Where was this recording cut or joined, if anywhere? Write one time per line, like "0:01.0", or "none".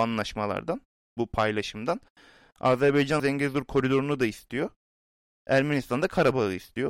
0:03.2